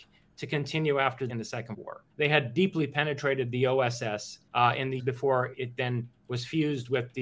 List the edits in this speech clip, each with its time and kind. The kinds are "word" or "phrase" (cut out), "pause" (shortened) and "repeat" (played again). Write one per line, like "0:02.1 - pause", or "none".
0:01.3 - phrase
0:01.7 - word
0:02.1 - pause
0:04.5 - pause
0:05.0 - word
0:05.5 - word